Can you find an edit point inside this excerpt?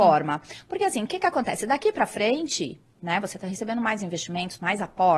no; 0 cuts

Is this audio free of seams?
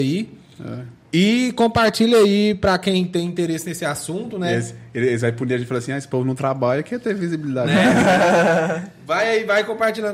yes; 0 cuts

